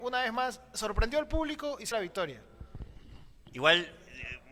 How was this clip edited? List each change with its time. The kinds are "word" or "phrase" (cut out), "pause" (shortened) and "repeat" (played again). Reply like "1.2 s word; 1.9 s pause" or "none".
1.9 s word